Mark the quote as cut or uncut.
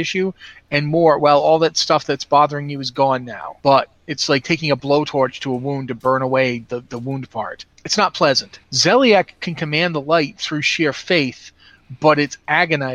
cut